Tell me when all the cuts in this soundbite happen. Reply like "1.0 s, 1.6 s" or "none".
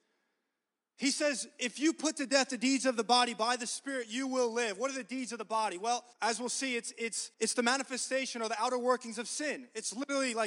6.1 s, 7.3 s